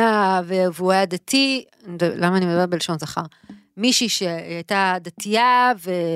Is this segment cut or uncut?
uncut